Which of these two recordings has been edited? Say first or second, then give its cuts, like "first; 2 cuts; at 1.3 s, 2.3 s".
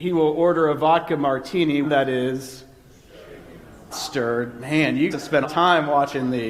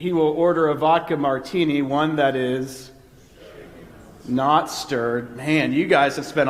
first; 4 cuts; at 1.8 s, 3.9 s, 5.1 s, 5.4 s